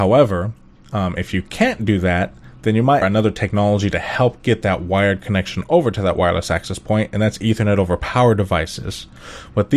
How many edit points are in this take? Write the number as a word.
one